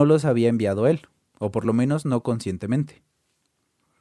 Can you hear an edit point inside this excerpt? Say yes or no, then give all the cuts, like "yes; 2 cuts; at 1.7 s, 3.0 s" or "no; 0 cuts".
no; 0 cuts